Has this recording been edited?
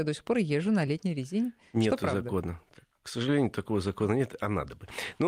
no; 0 cuts

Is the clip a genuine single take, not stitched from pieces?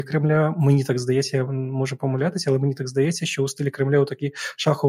yes; 0 cuts

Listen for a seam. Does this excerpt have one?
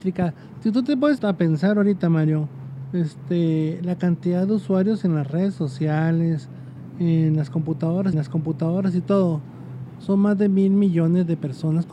yes; 2 cuts; at 1.2 s, 8.1 s

